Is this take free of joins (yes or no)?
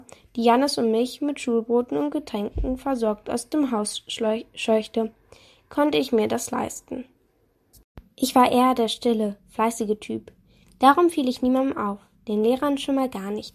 yes